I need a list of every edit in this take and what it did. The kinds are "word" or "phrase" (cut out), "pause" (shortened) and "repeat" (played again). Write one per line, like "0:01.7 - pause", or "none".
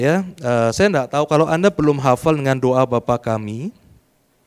none